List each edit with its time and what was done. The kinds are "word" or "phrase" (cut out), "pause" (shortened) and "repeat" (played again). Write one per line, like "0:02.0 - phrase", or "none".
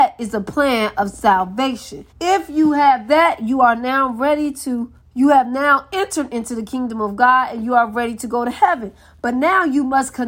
0:02.1 - pause
0:05.0 - pause